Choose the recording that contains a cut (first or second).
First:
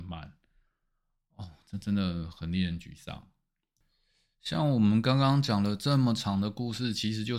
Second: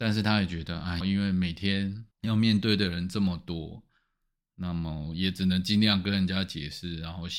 second